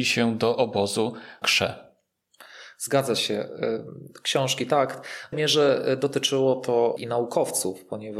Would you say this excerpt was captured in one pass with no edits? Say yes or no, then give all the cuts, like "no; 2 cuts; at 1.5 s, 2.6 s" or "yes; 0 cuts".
no; 3 cuts; at 1.4 s, 5.3 s, 7.0 s